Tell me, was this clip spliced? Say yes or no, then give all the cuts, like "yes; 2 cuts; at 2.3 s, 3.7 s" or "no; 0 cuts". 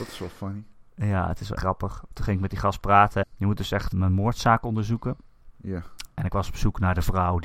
yes; 3 cuts; at 1.6 s, 3.2 s, 3.9 s